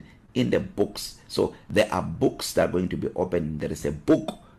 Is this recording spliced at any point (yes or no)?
no